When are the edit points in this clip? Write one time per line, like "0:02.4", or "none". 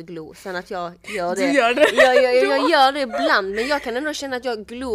none